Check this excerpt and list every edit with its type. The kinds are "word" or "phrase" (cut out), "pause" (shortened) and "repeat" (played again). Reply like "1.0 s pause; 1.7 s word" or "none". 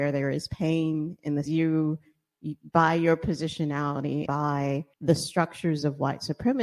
1.4 s phrase; 4.3 s word; 4.9 s pause